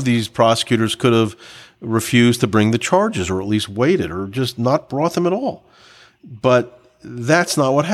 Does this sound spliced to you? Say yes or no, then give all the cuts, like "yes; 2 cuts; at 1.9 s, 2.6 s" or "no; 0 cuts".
no; 0 cuts